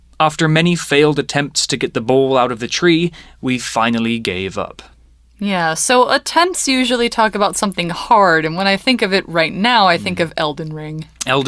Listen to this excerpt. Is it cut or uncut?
uncut